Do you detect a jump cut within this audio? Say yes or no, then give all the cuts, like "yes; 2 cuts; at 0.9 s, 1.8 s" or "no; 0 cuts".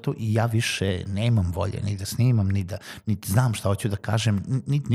no; 0 cuts